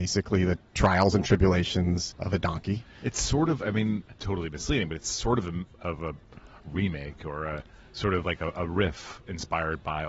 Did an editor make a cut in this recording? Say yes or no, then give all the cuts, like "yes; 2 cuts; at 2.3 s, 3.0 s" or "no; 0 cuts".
no; 0 cuts